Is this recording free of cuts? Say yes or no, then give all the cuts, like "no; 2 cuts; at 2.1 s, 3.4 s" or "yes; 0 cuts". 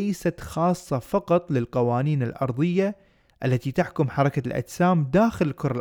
yes; 0 cuts